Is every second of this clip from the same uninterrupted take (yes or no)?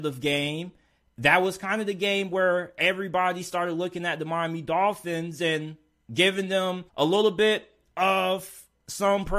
no